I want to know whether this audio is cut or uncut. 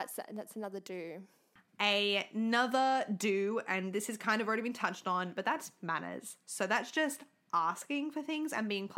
uncut